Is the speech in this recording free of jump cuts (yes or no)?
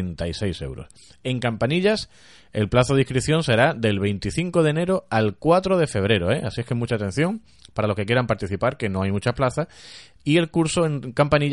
yes